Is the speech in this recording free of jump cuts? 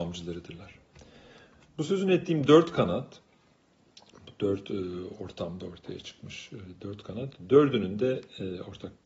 yes; 0 cuts

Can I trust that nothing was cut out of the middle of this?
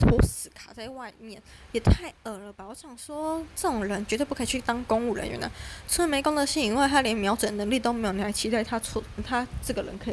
no; 1 cut; at 9.2 s

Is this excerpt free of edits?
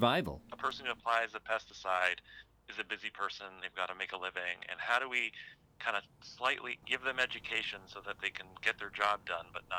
yes; 0 cuts

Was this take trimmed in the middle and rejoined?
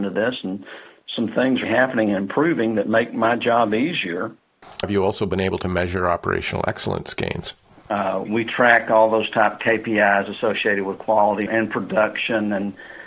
yes; 4 cuts; at 1.6 s, 4.8 s, 8.3 s, 11.5 s

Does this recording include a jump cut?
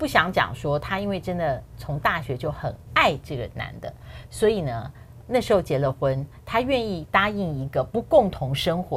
yes; 1 cut; at 5.2 s

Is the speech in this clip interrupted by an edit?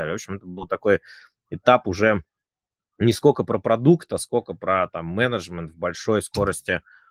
no; 0 cuts

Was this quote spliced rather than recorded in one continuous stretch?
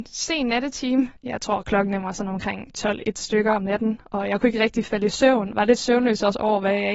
yes; 2 cuts; at 1.2 s, 5.5 s

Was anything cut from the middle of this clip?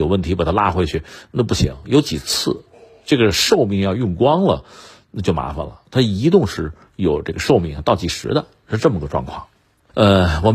no; 0 cuts

